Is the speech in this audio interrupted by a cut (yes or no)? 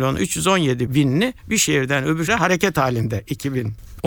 yes